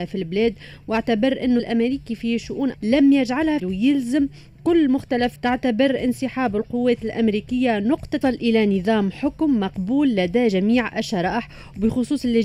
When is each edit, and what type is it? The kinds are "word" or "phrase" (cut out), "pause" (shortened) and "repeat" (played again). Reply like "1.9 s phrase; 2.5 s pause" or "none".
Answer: 1.6 s word; 2.7 s word; 3.6 s phrase; 5.4 s phrase; 8.2 s phrase

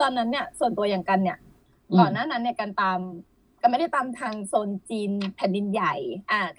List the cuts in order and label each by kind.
none

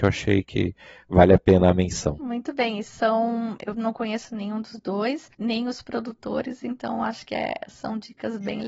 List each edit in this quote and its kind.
5.3 s pause

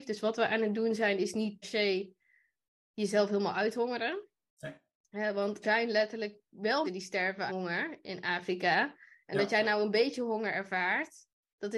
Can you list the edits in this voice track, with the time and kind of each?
1.6 s word; 5.6 s word; 6.8 s word; 7.5 s word

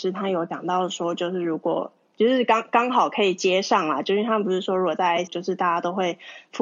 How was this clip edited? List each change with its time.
5.3 s word

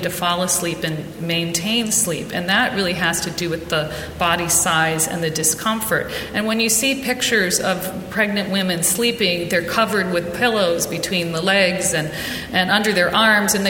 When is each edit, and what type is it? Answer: none

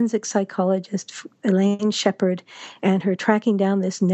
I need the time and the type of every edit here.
none

